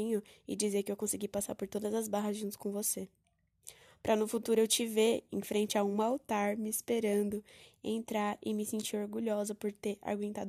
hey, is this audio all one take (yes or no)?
yes